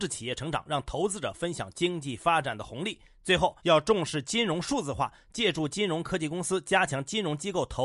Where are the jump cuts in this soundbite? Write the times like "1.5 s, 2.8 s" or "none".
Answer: 3.6 s